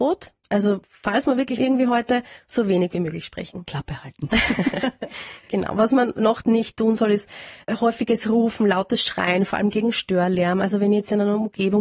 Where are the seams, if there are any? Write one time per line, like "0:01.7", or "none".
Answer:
0:01.6
0:07.6